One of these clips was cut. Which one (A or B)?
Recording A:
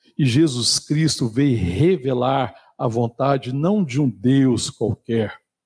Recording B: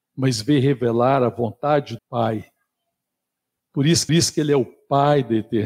B